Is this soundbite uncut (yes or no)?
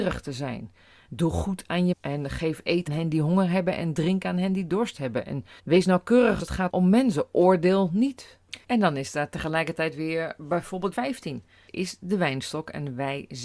no